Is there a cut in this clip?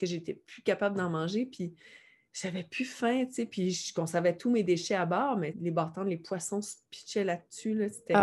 yes; 1 cut; at 5.5 s

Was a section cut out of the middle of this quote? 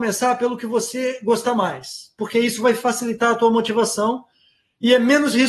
no; 0 cuts

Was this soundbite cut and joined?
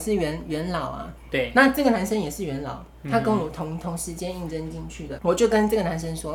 yes; 1 cut; at 5.2 s

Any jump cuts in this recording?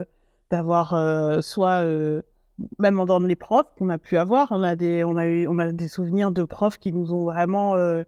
no; 0 cuts

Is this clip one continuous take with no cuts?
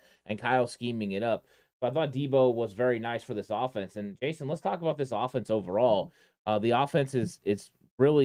yes; 0 cuts

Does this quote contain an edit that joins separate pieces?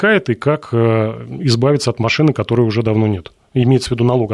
no; 0 cuts

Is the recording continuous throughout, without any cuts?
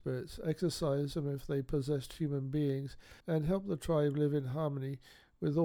no; 1 cut; at 3.2 s

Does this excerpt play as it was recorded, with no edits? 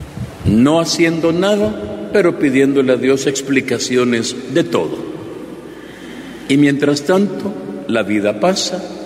yes; 0 cuts

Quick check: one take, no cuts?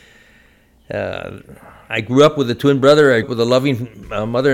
no; 1 cut; at 3.2 s

